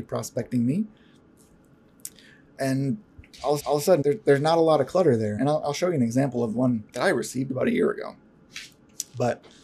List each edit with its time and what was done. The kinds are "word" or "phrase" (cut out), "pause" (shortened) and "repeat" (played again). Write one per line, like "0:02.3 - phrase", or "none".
0:03.6 - repeat
0:04.0 - word
0:05.4 - word
0:06.9 - pause